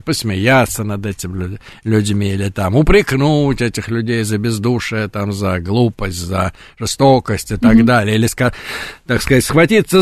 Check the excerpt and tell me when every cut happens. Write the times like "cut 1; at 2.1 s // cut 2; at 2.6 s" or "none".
none